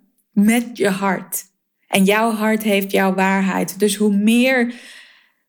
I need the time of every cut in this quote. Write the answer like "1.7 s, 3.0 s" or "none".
1.7 s